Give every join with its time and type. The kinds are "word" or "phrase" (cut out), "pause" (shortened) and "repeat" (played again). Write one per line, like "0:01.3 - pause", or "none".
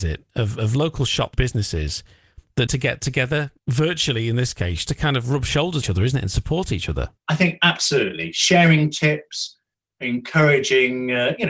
0:01.3 - word
0:02.7 - word
0:03.6 - pause
0:04.9 - word
0:05.8 - phrase
0:07.2 - pause